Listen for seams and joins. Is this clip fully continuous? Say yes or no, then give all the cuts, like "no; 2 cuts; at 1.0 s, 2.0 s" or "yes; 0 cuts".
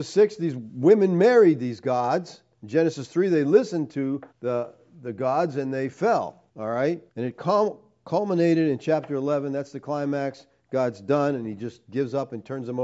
no; 4 cuts; at 2.5 s, 4.3 s, 6.5 s, 7.1 s